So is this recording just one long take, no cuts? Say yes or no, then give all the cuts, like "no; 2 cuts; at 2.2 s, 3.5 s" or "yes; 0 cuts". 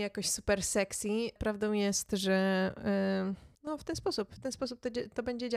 no; 2 cuts; at 1.4 s, 3.5 s